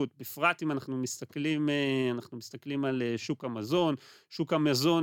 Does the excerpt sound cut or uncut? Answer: uncut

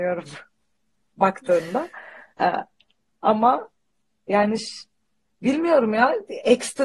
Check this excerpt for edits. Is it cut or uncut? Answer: uncut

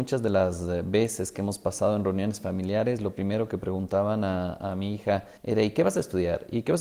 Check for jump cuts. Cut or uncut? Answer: cut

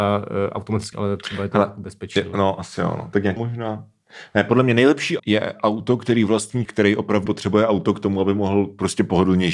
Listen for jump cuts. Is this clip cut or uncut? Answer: cut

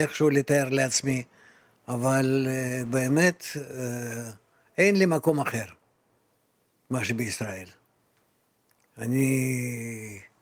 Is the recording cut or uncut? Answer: uncut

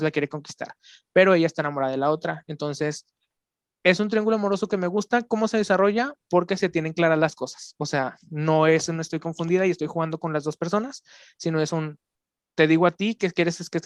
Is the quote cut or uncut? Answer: uncut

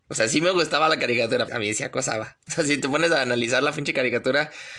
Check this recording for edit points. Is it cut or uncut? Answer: cut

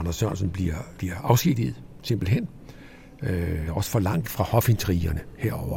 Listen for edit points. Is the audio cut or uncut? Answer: cut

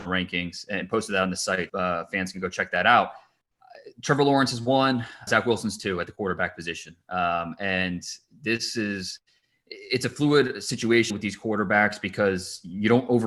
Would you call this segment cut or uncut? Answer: cut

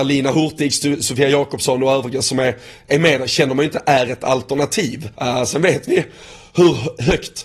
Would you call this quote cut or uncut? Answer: cut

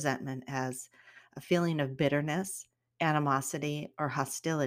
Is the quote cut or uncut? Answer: uncut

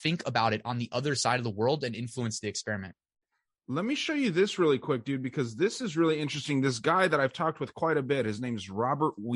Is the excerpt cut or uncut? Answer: uncut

